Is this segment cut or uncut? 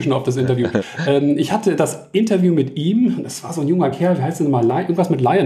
uncut